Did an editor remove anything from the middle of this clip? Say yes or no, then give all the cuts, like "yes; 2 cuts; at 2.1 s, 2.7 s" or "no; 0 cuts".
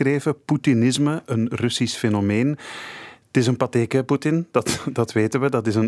no; 0 cuts